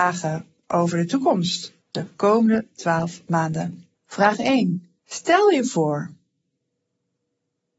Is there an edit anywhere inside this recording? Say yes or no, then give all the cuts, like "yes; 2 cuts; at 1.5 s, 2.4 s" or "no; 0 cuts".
yes; 3 cuts; at 1.8 s, 3.9 s, 5.0 s